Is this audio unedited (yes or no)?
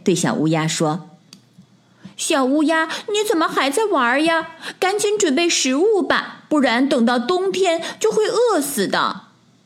yes